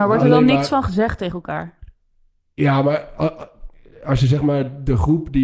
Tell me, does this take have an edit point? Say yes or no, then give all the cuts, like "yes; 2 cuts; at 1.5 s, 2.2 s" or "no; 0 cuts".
no; 0 cuts